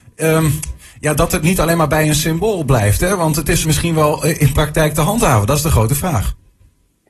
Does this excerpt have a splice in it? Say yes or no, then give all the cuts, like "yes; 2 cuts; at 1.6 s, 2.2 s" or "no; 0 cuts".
yes; 1 cut; at 3.6 s